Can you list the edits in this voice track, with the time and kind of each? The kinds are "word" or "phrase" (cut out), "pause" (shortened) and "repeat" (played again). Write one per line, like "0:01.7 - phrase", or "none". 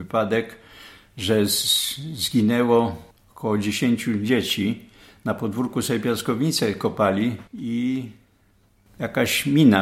0:07.5 - pause